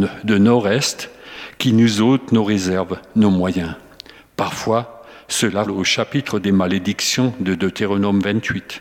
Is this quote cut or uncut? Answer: cut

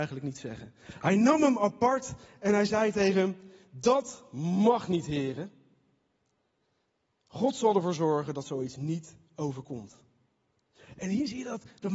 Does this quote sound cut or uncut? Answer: uncut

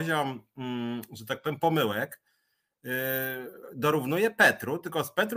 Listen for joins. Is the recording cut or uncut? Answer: uncut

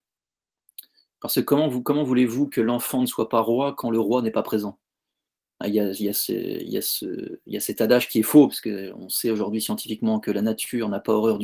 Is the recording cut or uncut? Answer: uncut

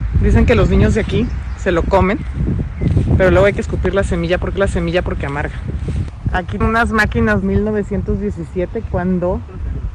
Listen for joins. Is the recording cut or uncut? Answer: cut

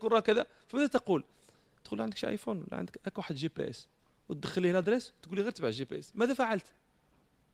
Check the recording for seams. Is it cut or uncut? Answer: uncut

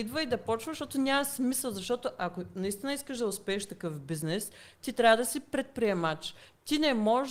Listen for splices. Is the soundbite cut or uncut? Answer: uncut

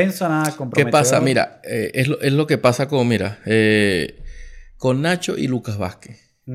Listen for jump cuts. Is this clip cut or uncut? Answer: uncut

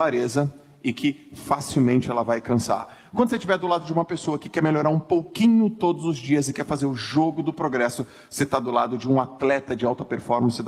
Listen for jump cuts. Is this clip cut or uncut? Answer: uncut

